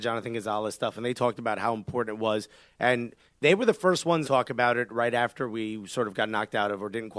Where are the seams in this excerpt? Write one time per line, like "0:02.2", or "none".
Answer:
0:04.2